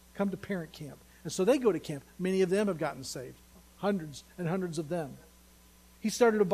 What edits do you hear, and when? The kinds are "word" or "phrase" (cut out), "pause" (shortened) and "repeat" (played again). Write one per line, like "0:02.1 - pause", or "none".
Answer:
none